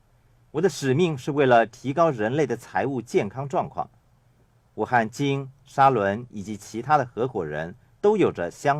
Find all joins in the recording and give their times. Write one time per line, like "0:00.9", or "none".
none